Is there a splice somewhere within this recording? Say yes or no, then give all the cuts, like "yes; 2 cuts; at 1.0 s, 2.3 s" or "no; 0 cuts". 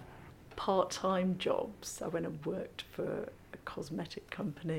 no; 0 cuts